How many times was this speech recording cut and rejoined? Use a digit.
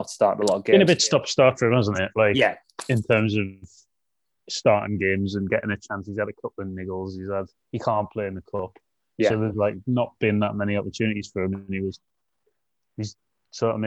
0